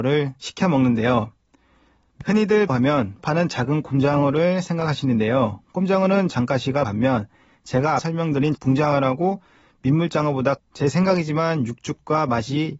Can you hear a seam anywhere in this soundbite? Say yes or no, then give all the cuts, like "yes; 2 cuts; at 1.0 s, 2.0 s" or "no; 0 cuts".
yes; 7 cuts; at 2.7 s, 3.2 s, 6.3 s, 6.8 s, 8.0 s, 8.5 s, 10.6 s